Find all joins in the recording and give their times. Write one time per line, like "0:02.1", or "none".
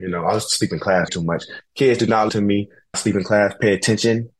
0:01.1
0:02.3
0:02.9